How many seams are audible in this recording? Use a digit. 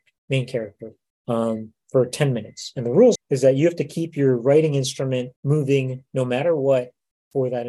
3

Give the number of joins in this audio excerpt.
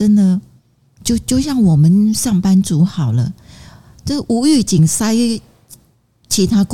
0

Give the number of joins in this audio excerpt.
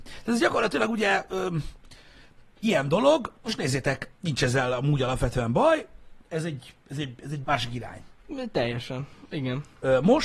5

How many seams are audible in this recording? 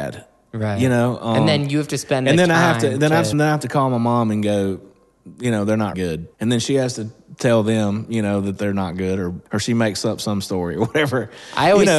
4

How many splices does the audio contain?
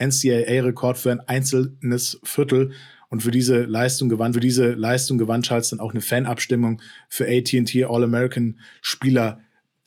1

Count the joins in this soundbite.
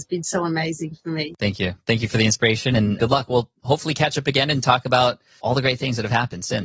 0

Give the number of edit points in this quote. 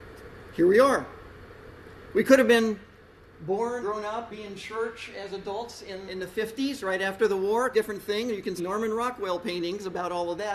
5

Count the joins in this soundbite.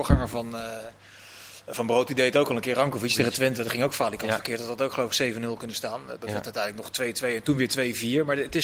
0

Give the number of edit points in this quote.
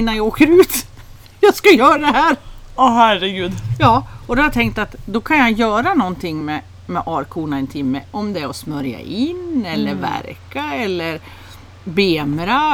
0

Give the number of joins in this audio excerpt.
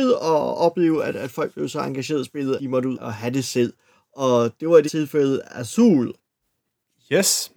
3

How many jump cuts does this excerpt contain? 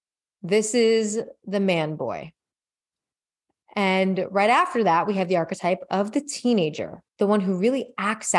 1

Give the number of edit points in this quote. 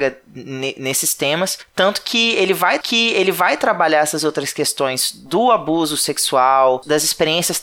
1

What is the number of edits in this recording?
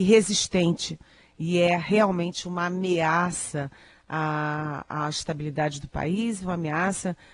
0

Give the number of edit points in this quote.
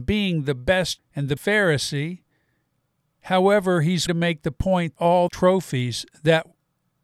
5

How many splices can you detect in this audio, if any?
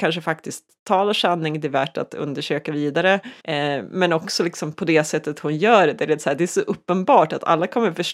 1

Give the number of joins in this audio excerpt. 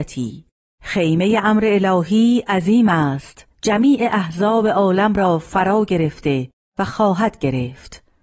1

